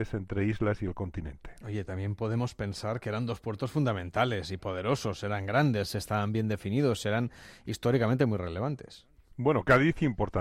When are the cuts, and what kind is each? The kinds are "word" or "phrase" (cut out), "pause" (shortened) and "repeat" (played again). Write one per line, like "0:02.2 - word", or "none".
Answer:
none